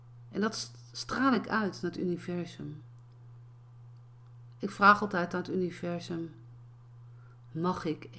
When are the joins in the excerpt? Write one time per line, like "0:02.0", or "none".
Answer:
none